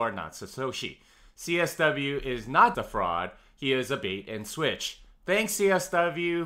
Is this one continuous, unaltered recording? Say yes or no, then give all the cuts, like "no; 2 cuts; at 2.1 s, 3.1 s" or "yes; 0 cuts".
no; 1 cut; at 2.7 s